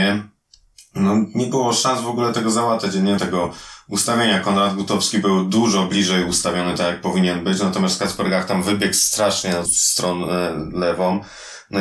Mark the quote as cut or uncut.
cut